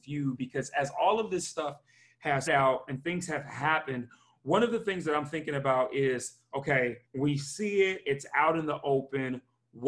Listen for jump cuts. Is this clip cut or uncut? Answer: cut